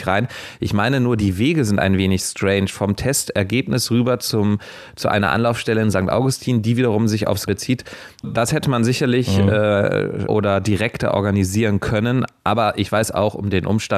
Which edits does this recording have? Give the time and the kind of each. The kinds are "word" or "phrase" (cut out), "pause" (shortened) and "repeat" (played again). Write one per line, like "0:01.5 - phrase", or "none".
0:07.5 - word
0:08.2 - word
0:10.3 - word